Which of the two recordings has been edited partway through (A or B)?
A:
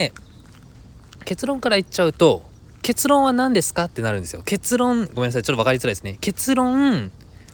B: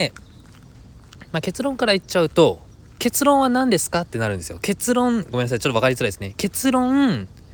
A